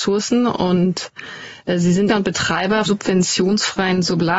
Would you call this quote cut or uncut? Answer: cut